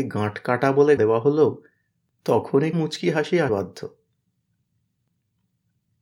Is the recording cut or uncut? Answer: cut